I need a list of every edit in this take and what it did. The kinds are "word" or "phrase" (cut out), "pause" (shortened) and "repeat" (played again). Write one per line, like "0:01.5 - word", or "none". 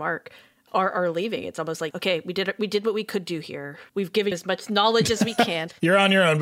0:01.9 - word
0:03.9 - pause
0:04.3 - word